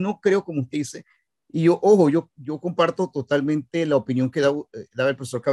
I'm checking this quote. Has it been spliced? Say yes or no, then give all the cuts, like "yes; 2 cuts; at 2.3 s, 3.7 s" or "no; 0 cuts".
no; 0 cuts